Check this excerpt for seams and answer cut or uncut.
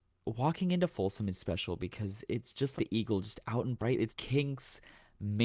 cut